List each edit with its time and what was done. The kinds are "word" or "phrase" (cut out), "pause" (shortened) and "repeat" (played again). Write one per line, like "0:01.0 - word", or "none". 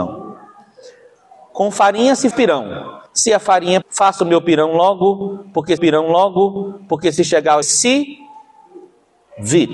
0:02.3 - word
0:03.1 - pause
0:03.8 - word
0:05.8 - repeat
0:07.6 - phrase